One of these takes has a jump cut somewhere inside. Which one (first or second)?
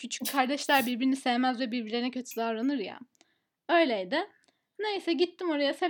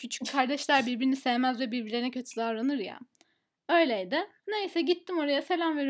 second